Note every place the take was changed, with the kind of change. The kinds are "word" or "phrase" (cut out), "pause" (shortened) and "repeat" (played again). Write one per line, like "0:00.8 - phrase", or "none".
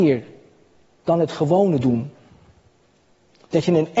none

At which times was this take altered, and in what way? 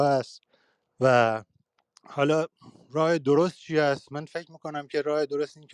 none

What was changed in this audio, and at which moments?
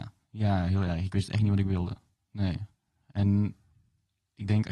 none

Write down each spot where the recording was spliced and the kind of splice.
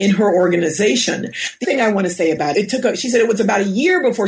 0:01.6 - word
0:02.5 - word

